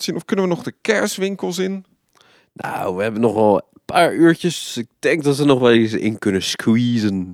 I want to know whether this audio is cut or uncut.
uncut